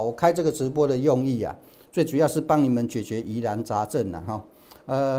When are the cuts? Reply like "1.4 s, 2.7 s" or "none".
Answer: none